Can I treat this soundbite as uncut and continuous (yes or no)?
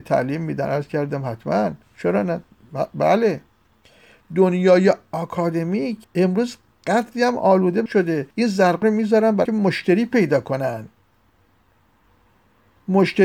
no